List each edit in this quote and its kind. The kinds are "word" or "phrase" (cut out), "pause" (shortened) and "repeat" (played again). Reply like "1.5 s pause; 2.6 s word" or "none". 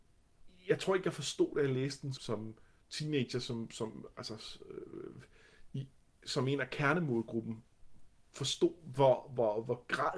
2.1 s word